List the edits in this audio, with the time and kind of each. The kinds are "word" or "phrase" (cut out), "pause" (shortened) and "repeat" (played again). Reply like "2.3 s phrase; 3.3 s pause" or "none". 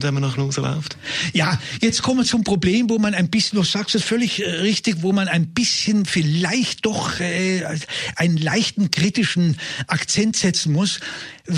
none